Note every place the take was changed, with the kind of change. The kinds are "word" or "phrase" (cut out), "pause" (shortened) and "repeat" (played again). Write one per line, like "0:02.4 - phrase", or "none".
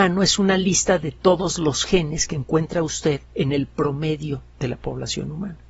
0:03.2 - pause